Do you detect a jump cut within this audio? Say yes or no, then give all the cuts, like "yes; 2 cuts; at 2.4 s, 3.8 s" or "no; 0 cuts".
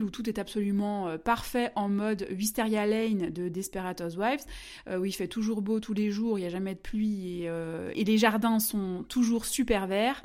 no; 0 cuts